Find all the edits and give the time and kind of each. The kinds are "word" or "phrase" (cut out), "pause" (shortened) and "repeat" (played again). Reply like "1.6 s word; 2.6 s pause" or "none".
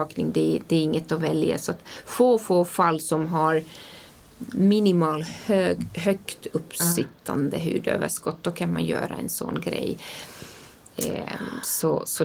none